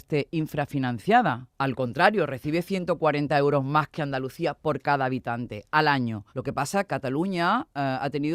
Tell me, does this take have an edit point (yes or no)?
yes